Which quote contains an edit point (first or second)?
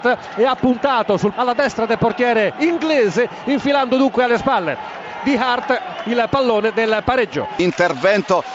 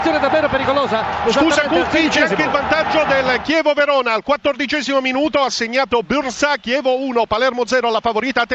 first